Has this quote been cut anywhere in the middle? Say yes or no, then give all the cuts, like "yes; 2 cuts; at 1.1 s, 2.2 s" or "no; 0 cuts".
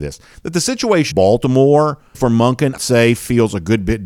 yes; 3 cuts; at 1.1 s, 2.1 s, 2.8 s